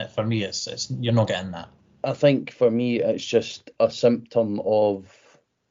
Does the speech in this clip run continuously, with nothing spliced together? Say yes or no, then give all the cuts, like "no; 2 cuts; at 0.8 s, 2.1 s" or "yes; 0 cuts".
yes; 0 cuts